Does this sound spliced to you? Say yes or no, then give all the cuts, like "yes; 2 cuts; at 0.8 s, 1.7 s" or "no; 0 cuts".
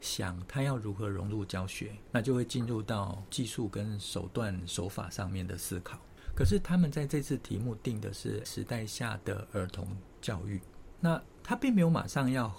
yes; 1 cut; at 8.4 s